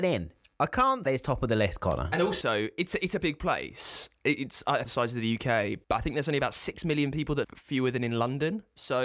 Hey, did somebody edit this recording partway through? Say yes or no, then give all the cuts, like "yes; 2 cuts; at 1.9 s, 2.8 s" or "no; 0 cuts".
yes; 5 cuts; at 1.1 s, 3.2 s, 4.9 s, 5.8 s, 7.4 s